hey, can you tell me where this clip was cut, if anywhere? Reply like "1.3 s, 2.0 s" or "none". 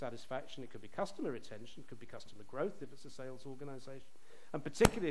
none